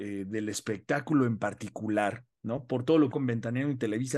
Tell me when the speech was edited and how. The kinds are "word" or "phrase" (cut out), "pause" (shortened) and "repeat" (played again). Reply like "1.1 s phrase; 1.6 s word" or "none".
3.1 s phrase